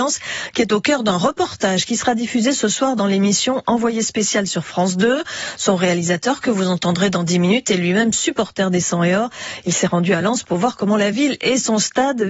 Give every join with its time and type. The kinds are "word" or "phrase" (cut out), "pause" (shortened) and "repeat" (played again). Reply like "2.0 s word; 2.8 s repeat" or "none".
none